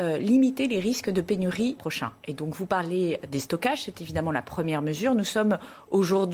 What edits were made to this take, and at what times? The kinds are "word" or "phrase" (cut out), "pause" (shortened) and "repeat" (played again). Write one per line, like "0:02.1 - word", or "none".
0:01.8 - phrase